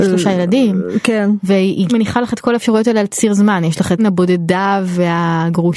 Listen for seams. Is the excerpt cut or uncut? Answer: cut